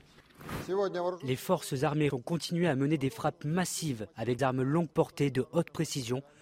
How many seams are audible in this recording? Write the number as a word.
two